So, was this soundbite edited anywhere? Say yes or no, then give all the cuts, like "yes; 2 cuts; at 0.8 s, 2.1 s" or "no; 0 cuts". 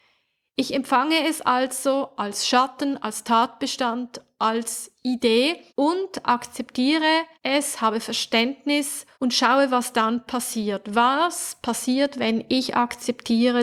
yes; 3 cuts; at 5.7 s, 7.3 s, 9.1 s